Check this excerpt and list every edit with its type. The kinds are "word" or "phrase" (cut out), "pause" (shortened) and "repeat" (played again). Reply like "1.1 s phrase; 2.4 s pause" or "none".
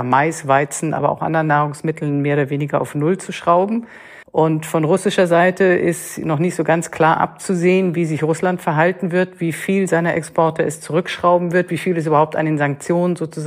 4.2 s pause